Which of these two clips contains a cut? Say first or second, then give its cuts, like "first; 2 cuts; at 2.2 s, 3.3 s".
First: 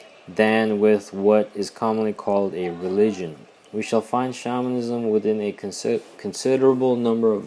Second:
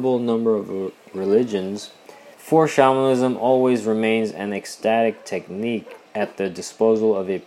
second; 2 cuts; at 2.3 s, 6.1 s